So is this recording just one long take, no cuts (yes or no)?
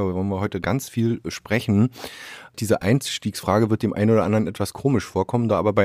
yes